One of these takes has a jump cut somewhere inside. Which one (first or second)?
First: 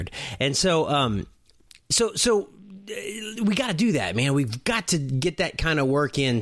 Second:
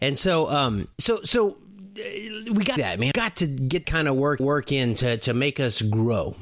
second